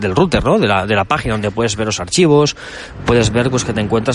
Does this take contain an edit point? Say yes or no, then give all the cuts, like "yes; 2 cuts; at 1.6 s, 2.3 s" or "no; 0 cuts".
no; 0 cuts